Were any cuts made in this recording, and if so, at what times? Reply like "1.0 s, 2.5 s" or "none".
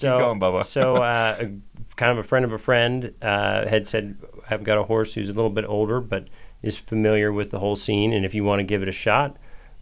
none

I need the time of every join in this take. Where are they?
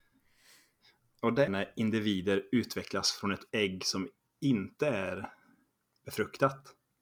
1.5 s, 3.5 s

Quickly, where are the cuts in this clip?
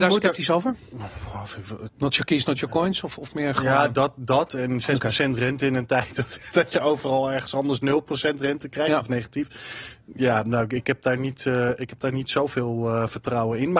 none

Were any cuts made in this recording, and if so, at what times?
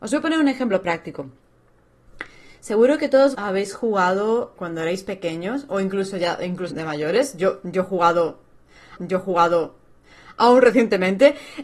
3.3 s, 4.6 s, 6.7 s, 9.0 s

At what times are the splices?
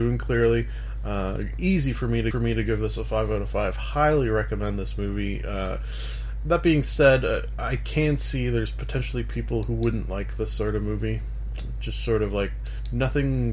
2.3 s

